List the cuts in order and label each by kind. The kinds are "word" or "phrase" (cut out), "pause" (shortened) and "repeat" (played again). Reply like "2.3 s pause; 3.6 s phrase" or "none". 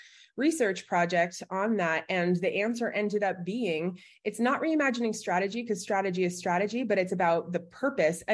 none